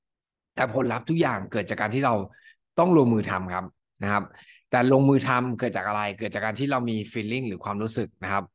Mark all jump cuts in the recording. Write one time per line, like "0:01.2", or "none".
none